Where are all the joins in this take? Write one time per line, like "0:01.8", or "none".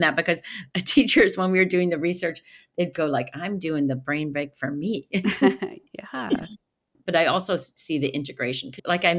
none